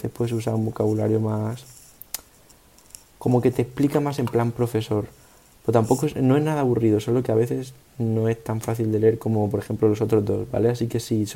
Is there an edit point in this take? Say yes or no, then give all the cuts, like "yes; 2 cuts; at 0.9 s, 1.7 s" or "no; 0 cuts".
no; 0 cuts